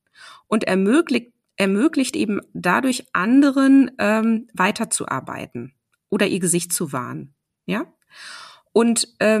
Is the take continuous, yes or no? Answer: yes